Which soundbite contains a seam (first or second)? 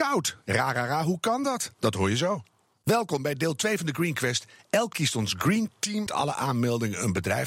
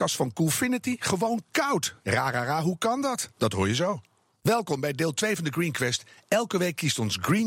first